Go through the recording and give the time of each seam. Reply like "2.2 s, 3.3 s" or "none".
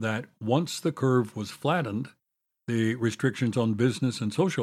none